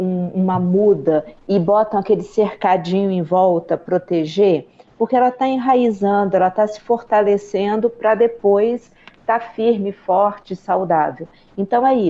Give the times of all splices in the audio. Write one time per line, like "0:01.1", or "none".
0:03.8